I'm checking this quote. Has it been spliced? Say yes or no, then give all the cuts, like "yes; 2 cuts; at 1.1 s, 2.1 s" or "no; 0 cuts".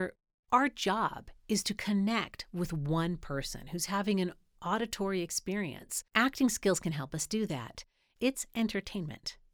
yes; 1 cut; at 6.1 s